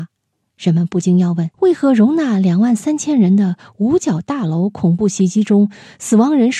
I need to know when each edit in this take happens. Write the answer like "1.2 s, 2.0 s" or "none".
1.5 s